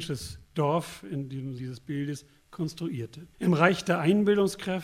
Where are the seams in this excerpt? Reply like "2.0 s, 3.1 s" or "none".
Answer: 1.6 s, 3.3 s